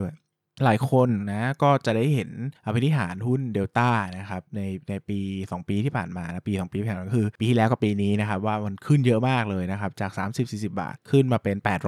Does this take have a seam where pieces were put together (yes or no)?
no